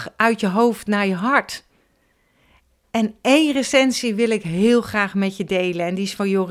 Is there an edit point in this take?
no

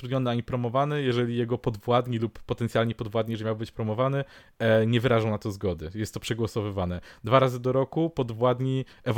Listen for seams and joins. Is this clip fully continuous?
yes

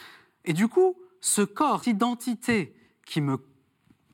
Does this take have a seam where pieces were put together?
yes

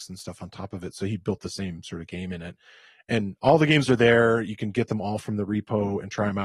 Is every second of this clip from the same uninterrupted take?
yes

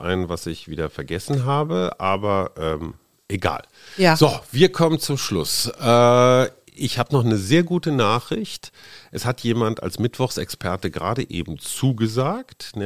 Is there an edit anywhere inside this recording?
no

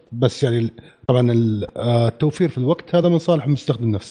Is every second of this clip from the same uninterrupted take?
yes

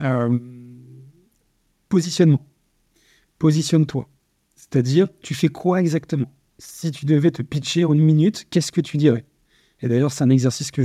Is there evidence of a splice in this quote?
no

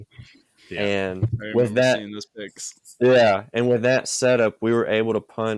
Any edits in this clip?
no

